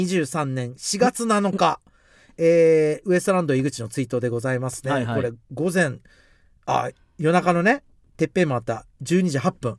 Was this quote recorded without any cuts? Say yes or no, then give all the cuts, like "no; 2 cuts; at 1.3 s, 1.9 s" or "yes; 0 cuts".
yes; 0 cuts